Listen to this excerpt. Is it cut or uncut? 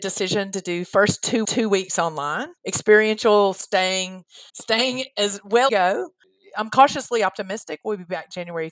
cut